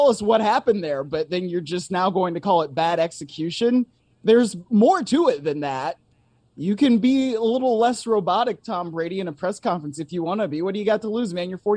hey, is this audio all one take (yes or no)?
yes